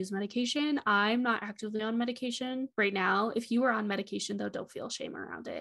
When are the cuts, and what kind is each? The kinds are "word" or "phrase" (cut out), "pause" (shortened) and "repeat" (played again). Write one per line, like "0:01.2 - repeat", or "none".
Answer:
0:02.7 - pause